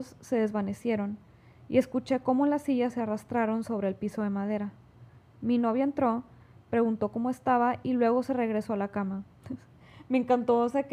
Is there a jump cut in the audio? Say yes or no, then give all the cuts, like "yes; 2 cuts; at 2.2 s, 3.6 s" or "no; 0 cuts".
no; 0 cuts